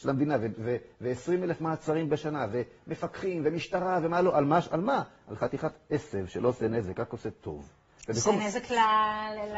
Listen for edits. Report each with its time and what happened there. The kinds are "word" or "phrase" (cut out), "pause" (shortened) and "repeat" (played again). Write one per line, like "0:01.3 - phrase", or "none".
none